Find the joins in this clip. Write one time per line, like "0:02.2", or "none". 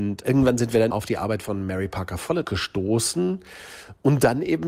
0:00.9
0:02.4

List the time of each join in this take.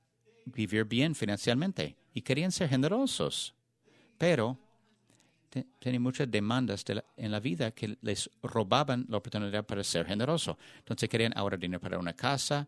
none

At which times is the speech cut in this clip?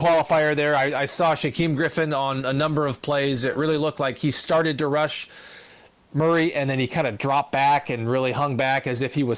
none

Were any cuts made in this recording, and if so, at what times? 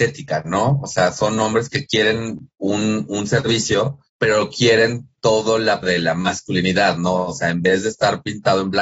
0:04.1
0:05.8

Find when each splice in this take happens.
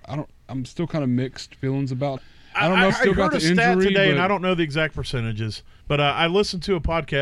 0:02.2
0:02.9
0:05.8

